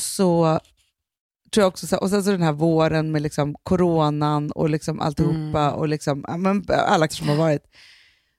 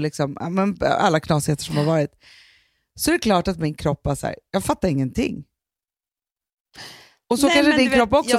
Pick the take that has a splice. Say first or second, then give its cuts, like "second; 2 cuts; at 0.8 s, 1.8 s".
first; 1 cut; at 7.1 s